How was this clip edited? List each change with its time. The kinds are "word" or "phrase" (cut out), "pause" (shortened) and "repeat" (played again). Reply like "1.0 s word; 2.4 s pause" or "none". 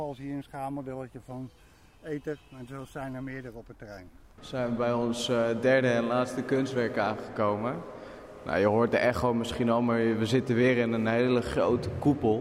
none